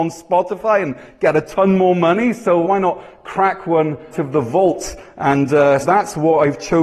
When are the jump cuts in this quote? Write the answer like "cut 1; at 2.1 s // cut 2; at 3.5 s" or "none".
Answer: cut 1; at 2.6 s // cut 2; at 4.1 s // cut 3; at 5.8 s